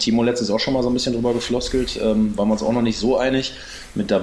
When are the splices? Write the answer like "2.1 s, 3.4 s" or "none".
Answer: none